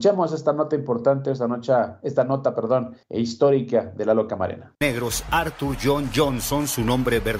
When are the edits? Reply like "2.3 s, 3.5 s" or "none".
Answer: 3.0 s, 4.7 s